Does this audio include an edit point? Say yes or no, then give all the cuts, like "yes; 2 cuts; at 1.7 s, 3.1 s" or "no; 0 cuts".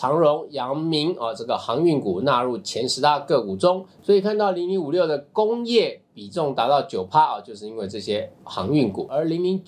yes; 1 cut; at 3.9 s